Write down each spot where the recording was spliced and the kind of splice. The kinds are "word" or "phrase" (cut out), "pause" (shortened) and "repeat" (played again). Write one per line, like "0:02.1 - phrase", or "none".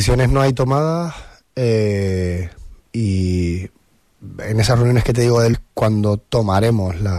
0:02.8 - pause
0:05.5 - word